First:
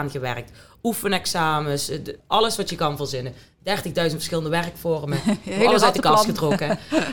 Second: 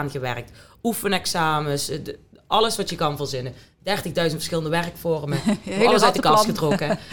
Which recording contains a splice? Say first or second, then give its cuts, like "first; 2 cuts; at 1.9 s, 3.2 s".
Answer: first; 1 cut; at 2.2 s